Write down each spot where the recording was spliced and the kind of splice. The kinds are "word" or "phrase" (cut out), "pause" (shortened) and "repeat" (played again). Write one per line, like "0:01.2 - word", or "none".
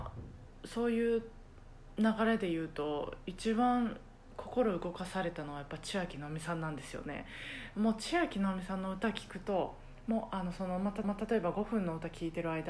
0:11.0 - repeat